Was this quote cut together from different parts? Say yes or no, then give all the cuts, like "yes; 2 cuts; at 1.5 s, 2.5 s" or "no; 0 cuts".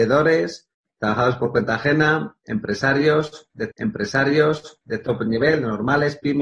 yes; 1 cut; at 3.7 s